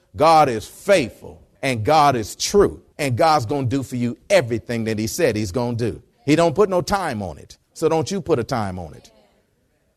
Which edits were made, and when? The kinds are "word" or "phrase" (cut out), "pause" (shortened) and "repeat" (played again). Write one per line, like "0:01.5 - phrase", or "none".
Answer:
0:01.5 - pause
0:02.9 - pause
0:06.1 - pause